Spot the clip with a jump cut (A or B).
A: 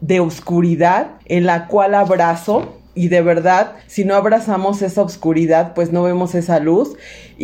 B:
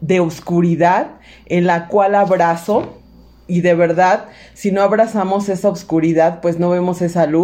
A